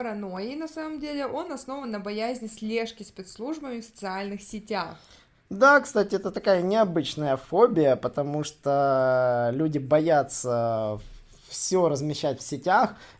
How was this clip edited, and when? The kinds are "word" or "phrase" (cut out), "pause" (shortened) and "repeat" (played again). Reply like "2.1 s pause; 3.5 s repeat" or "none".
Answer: none